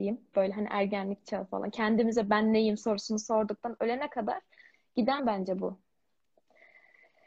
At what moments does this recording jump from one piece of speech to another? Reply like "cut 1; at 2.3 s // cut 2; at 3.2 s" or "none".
cut 1; at 5.2 s